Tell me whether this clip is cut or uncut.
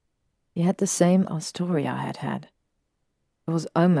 cut